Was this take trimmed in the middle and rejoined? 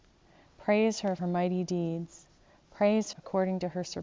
yes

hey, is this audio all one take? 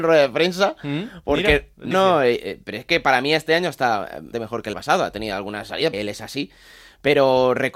no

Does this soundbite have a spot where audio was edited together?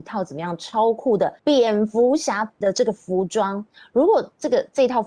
yes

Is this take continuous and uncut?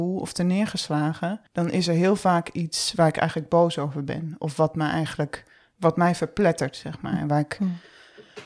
no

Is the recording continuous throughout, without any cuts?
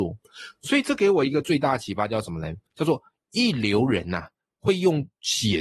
yes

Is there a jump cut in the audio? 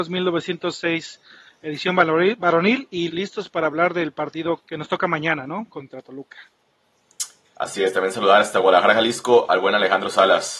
yes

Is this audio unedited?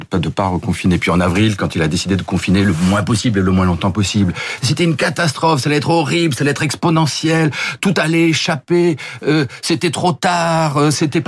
yes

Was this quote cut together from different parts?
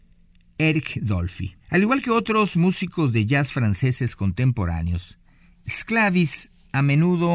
yes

